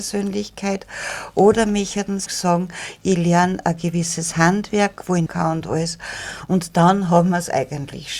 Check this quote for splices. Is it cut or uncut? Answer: cut